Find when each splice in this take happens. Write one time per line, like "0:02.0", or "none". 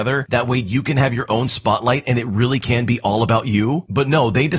none